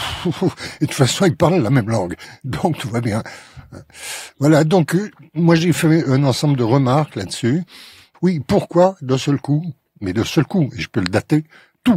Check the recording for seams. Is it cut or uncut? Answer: uncut